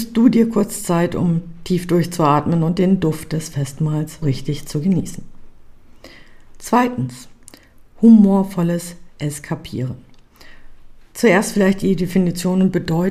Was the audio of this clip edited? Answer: yes; 1 cut; at 4.2 s

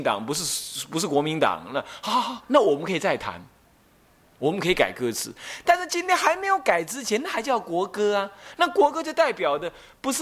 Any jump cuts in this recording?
no; 0 cuts

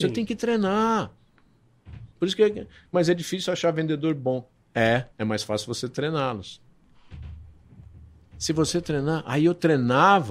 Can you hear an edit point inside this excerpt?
yes; 3 cuts; at 2.1 s, 2.9 s, 5.1 s

